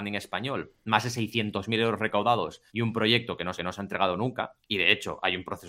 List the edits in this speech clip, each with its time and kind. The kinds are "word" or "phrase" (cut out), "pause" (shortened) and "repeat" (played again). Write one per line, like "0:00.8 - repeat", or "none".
0:02.7 - pause
0:03.6 - repeat